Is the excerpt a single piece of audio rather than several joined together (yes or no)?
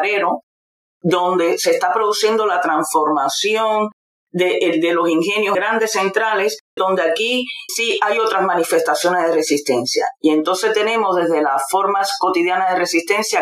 no